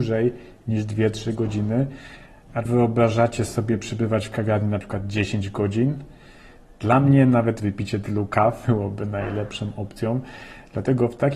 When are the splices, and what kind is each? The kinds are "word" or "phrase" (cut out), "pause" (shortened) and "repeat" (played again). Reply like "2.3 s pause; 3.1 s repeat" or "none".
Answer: 2.6 s word; 7.6 s word; 8.6 s word